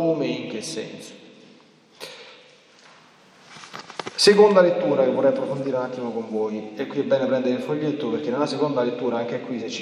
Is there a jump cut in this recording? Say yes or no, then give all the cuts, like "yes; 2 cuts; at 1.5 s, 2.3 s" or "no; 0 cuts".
no; 0 cuts